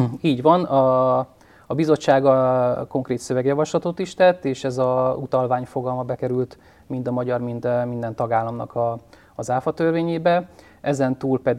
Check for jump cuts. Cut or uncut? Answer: uncut